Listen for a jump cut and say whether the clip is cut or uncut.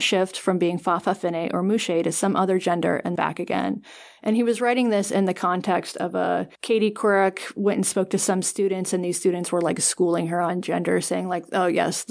cut